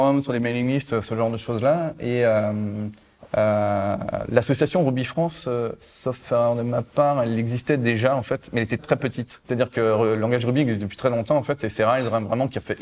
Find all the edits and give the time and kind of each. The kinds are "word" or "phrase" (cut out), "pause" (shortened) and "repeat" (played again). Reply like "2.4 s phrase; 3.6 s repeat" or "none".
8.8 s word; 9.4 s pause